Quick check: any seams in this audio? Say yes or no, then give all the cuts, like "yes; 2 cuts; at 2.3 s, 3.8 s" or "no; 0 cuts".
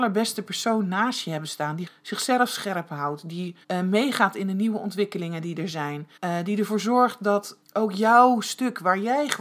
yes; 4 cuts; at 1.9 s, 3.6 s, 6.2 s, 7.6 s